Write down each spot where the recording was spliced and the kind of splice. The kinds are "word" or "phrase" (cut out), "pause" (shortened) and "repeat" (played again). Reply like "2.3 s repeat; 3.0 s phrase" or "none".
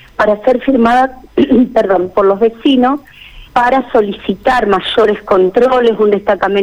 3.5 s pause